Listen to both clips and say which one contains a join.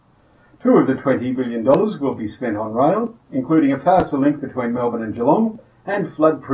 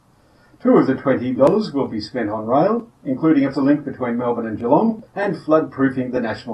second; 3 cuts; at 1.4 s, 3.5 s, 5.1 s

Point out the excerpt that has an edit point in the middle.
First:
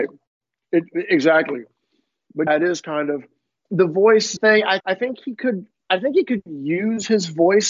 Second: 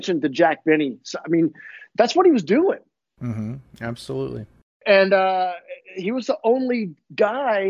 first; 4 cuts; at 2.5 s, 3.7 s, 4.4 s, 4.8 s

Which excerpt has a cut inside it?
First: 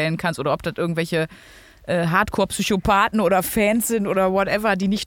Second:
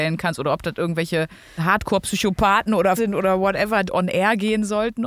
second; 3 cuts; at 1.6 s, 3.0 s, 3.9 s

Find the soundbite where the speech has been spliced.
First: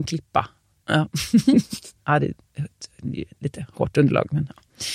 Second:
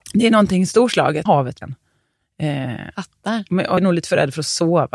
second; 3 cuts; at 1.3 s, 1.6 s, 3.8 s

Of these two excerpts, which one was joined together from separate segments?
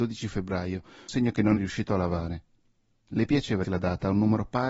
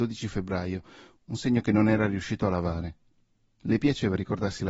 first; 3 cuts; at 1.1 s, 1.6 s, 3.6 s

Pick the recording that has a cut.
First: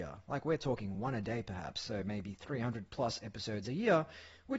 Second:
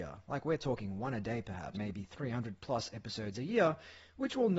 second; 1 cut; at 1.7 s

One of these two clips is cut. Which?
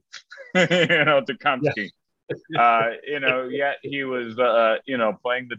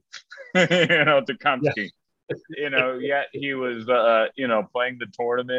second; 1 cut; at 2.5 s

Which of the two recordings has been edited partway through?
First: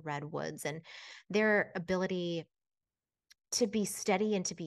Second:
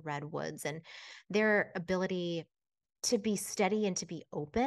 second; 1 cut; at 2.8 s

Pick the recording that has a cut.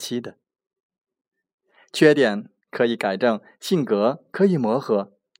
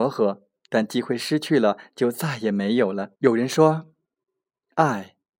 second; 1 cut; at 3.2 s

